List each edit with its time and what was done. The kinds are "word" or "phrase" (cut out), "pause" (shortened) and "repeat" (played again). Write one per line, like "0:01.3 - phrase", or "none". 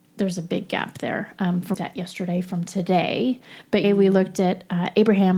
0:01.7 - phrase
0:03.8 - word